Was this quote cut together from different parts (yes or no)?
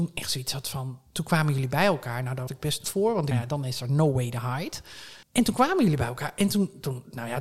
yes